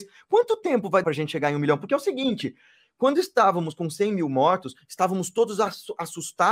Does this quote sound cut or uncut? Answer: cut